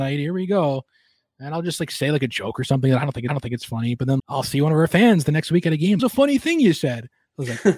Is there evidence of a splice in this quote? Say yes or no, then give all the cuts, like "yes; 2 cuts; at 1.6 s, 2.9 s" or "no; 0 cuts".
yes; 3 cuts; at 3.3 s, 4.2 s, 6.0 s